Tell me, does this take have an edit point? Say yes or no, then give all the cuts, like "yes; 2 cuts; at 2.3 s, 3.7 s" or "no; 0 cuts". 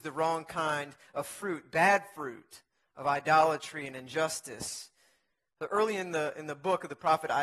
no; 0 cuts